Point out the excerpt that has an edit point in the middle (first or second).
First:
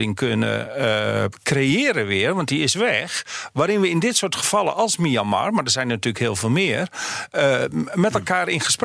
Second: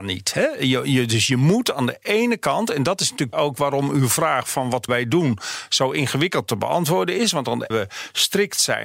second